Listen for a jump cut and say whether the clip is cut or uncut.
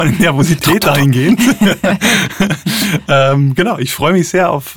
uncut